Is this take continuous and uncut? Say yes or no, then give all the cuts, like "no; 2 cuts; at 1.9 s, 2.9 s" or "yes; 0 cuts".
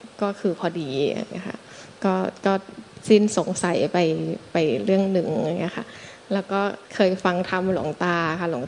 no; 1 cut; at 6.8 s